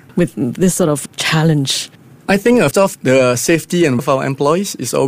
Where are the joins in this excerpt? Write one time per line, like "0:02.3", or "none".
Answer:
0:01.1
0:02.7
0:04.0